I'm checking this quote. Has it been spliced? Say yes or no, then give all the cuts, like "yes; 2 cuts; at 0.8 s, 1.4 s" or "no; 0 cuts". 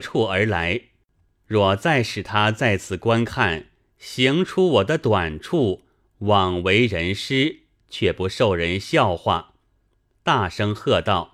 no; 0 cuts